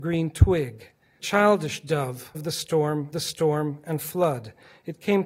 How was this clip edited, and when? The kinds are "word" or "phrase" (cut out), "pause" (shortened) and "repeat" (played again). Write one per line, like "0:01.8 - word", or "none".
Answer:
0:01.2 - word
0:02.3 - word
0:03.1 - repeat